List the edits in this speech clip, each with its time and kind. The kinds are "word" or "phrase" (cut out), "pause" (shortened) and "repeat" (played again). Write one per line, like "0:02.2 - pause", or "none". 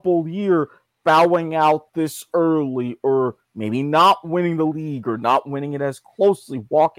0:03.4 - pause